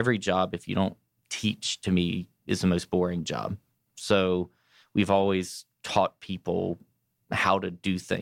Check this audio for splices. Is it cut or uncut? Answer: uncut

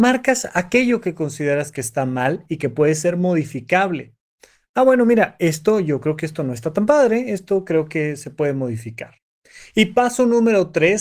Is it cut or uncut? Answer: uncut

